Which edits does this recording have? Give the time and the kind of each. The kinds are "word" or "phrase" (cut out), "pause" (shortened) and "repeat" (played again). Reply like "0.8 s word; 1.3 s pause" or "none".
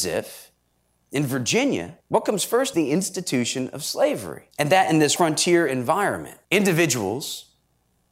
2.0 s pause; 2.7 s word; 4.5 s pause; 5.2 s word; 6.4 s pause

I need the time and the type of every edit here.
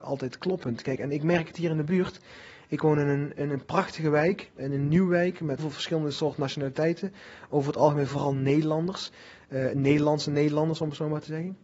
4.6 s word; 5.6 s word

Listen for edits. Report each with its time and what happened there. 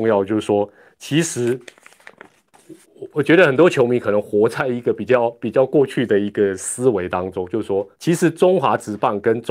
2.8 s pause; 7.9 s pause

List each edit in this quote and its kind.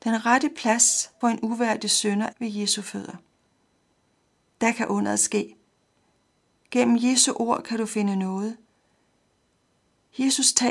1.2 s word; 2.3 s word

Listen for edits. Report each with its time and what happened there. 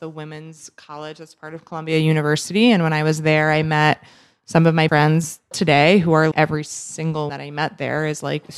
4.9 s word; 5.5 s word; 6.3 s word; 7.3 s word

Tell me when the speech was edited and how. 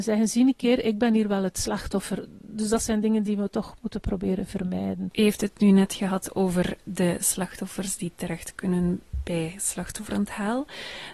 none

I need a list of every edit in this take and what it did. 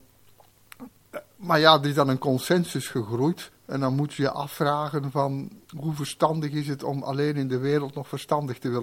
3.5 s pause; 5.6 s pause

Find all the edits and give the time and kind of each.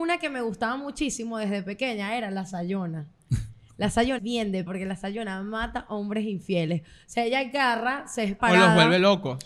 4.2 s word; 4.7 s word; 8.4 s word

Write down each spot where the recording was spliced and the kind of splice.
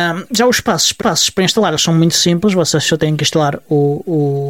1.0 s repeat

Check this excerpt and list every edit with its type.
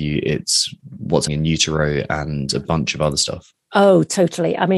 1.3 s word

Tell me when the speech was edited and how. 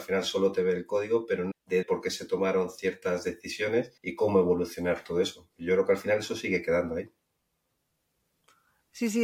1.5 s word; 1.8 s phrase; 4.0 s pause

